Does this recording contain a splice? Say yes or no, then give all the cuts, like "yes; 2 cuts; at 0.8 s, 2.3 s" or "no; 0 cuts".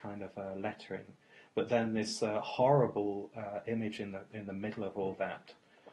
no; 0 cuts